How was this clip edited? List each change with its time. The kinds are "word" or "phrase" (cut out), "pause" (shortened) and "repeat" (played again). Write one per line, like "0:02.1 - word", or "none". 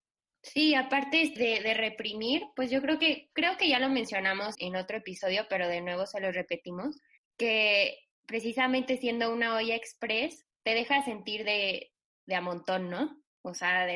0:01.4 - word
0:04.5 - word
0:07.2 - pause
0:10.5 - pause